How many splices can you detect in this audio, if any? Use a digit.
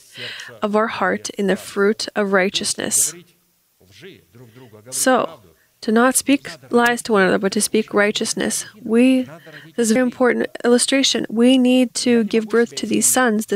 1